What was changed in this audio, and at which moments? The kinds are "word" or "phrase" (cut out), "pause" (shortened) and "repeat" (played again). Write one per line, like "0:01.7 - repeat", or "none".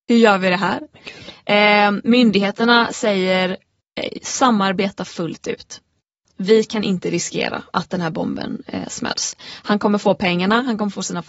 none